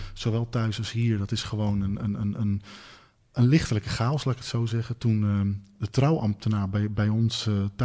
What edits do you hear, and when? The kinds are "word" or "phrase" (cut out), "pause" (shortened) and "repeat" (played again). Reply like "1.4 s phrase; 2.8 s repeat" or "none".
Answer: none